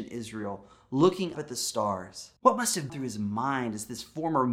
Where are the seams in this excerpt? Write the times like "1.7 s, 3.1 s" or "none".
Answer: 1.3 s, 2.4 s, 2.9 s